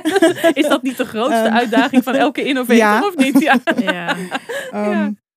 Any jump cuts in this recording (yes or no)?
no